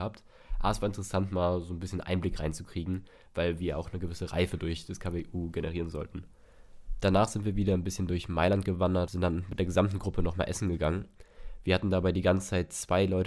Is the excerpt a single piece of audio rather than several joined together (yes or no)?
no